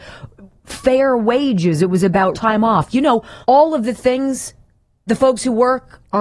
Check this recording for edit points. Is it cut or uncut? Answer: cut